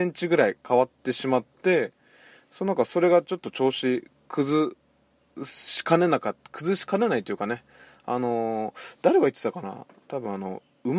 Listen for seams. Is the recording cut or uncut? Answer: uncut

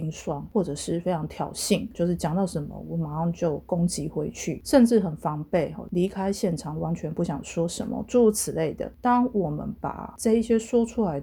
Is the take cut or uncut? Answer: cut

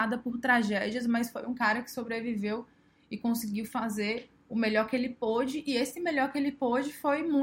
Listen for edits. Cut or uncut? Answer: uncut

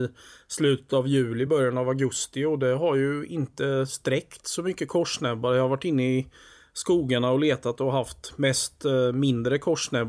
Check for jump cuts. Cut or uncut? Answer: uncut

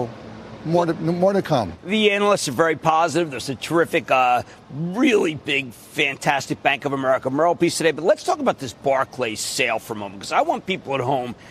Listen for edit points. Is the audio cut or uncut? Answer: uncut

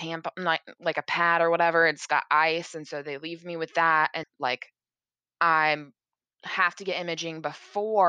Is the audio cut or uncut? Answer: cut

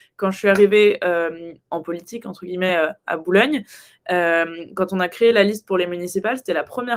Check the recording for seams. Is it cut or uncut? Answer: uncut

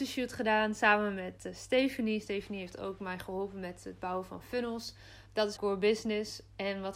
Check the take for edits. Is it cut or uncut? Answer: cut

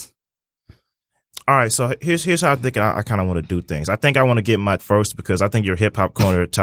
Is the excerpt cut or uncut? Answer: cut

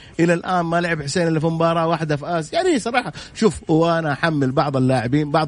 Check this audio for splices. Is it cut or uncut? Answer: uncut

